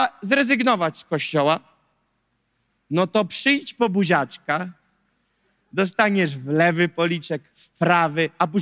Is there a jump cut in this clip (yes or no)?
no